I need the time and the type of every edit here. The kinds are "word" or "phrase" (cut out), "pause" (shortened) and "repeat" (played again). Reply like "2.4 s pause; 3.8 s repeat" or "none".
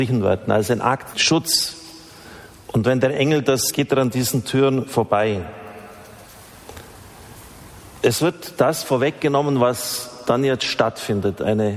1.1 s phrase; 3.7 s word